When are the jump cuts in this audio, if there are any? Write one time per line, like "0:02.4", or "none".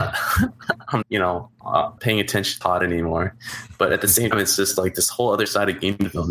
0:01.0
0:02.0
0:02.6
0:04.3